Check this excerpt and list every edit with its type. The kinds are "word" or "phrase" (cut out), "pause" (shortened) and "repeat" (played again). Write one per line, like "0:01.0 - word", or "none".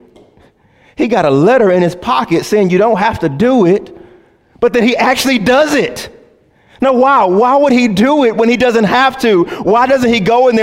none